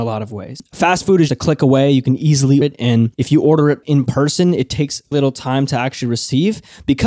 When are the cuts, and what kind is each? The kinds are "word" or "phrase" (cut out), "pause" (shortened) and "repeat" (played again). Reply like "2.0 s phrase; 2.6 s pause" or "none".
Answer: 1.3 s word; 2.6 s word; 3.1 s pause; 3.8 s word; 5.1 s word

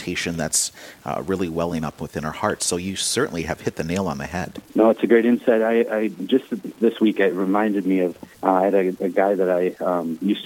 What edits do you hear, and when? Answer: 4.7 s pause; 8.3 s pause

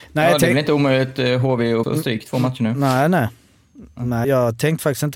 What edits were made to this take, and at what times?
1.8 s word; 4.2 s word

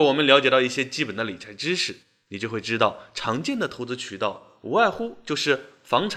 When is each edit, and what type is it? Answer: none

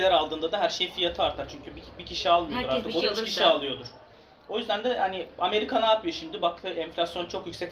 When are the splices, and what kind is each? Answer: none

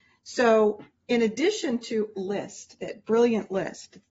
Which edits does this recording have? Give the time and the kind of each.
2.1 s word

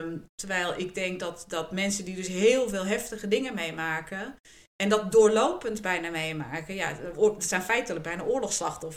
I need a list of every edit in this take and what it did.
none

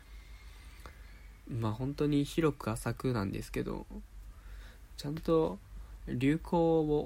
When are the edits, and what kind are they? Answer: 5.0 s phrase

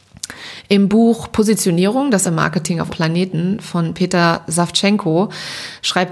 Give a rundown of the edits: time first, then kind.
2.2 s word; 2.9 s word

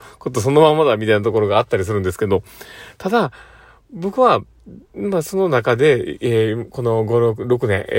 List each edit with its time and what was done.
4.8 s pause

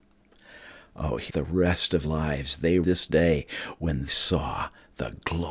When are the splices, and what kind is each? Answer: 1.3 s word; 2.0 s word; 2.8 s word; 4.1 s word

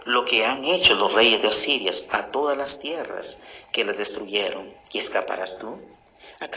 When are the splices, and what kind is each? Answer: 4.8 s pause

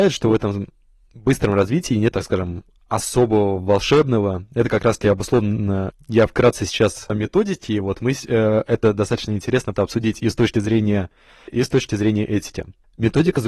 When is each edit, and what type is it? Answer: 2.1 s word; 5.9 s word; 7.1 s word; 9.7 s word; 11.5 s word

